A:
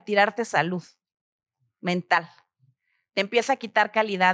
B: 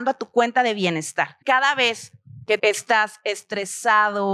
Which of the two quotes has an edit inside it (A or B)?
B